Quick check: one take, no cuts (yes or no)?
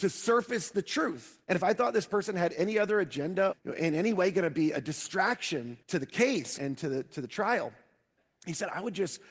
no